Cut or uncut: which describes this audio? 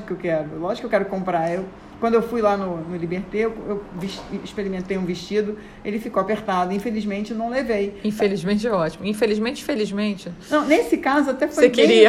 uncut